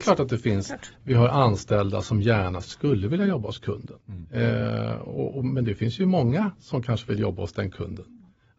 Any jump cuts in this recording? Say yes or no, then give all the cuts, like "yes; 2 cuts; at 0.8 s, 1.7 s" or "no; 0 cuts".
yes; 2 cuts; at 0.9 s, 4.0 s